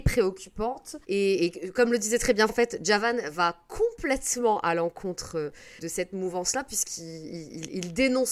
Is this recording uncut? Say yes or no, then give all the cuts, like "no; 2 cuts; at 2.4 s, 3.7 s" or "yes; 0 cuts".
no; 3 cuts; at 1.0 s, 2.5 s, 5.8 s